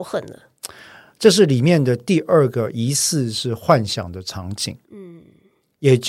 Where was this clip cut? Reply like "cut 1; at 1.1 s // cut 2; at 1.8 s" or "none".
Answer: cut 1; at 4.8 s